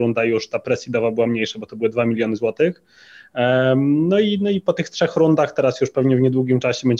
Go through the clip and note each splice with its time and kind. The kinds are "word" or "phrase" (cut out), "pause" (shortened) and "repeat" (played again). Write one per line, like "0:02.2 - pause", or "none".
none